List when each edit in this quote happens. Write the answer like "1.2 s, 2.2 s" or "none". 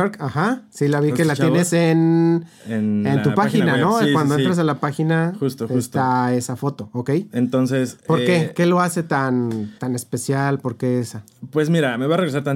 9.8 s